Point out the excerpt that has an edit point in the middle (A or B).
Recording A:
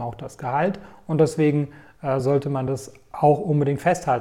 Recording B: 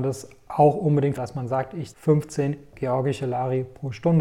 B